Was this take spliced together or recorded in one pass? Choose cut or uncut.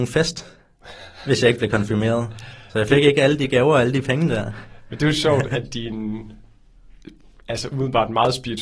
uncut